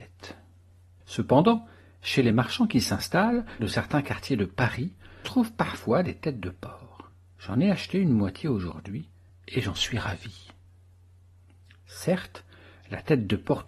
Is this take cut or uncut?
cut